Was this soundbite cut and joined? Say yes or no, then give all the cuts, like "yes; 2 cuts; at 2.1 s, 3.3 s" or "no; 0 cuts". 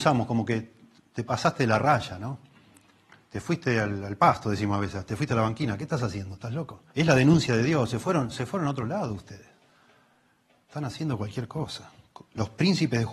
yes; 1 cut; at 6.9 s